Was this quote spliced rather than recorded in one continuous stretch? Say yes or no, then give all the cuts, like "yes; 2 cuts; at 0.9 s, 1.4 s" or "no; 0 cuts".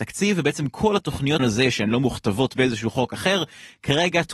yes; 1 cut; at 1.4 s